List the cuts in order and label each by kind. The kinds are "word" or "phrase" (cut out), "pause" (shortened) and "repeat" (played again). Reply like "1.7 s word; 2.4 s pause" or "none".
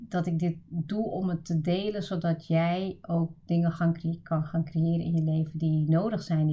none